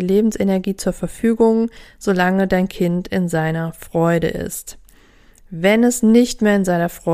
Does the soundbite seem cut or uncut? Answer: uncut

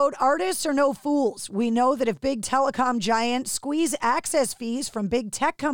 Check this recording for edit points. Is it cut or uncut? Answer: uncut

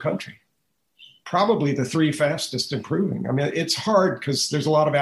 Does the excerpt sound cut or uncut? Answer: uncut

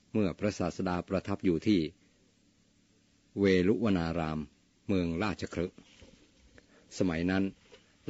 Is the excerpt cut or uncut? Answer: uncut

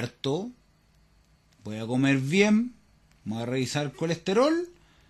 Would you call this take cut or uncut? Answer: uncut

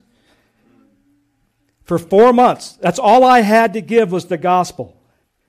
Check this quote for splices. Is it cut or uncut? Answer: uncut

